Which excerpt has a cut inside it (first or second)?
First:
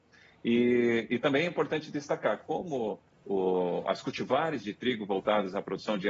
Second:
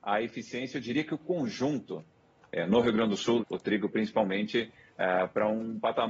second